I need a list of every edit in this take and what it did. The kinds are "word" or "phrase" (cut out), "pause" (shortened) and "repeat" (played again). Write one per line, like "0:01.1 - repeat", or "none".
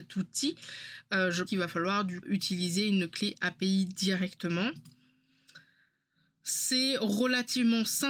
0:01.5 - word
0:02.2 - word